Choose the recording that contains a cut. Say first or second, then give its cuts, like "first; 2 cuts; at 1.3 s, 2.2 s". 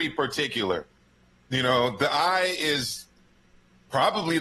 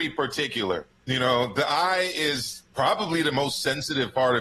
second; 2 cuts; at 1.0 s, 2.7 s